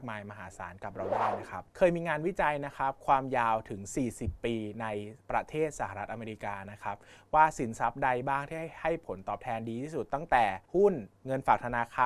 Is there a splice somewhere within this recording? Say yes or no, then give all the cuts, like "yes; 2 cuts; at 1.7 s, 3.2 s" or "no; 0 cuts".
yes; 4 cuts; at 1.7 s, 5.2 s, 10.6 s, 11.2 s